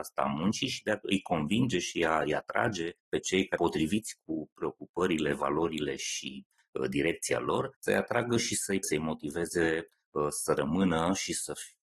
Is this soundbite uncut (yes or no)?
no